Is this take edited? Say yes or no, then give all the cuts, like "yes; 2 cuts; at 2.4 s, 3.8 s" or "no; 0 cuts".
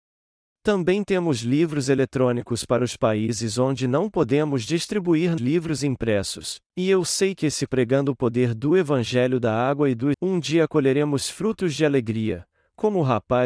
yes; 4 cuts; at 5.4 s, 6.7 s, 7.7 s, 10.1 s